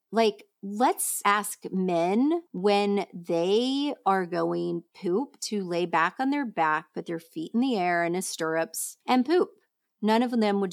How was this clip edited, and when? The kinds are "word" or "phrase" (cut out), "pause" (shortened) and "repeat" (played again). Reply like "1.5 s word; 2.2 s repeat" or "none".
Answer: 2.5 s pause; 9.0 s pause